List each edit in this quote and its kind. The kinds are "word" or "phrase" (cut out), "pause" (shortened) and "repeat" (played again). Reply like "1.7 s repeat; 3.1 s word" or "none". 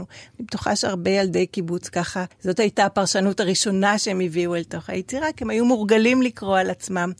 2.3 s pause